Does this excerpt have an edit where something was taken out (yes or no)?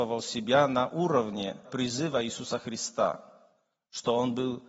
yes